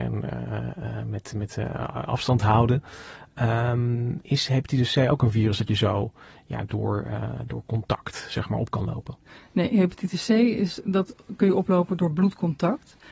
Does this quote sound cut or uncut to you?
uncut